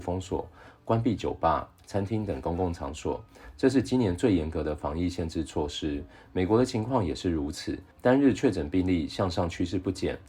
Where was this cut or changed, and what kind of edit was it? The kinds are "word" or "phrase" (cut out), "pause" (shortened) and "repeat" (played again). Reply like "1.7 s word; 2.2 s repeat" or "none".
7.9 s pause